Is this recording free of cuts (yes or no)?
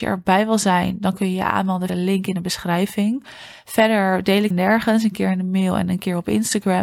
no